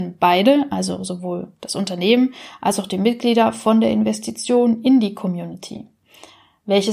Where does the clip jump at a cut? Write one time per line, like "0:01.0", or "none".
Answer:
none